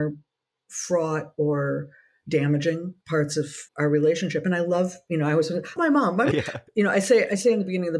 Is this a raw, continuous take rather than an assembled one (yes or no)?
no